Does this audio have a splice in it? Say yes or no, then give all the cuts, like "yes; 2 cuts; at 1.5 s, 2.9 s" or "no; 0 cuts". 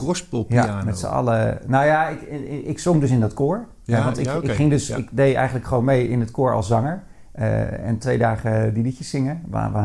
no; 0 cuts